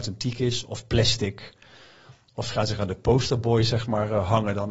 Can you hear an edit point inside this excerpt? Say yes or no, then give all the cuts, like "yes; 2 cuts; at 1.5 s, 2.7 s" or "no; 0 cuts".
yes; 1 cut; at 2.8 s